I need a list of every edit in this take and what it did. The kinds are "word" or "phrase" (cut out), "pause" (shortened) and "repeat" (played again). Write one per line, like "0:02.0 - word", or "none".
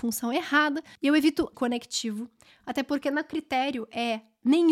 0:01.5 - phrase